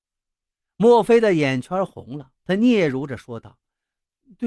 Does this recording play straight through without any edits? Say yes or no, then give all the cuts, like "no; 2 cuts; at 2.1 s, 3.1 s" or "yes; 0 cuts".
no; 1 cut; at 2.4 s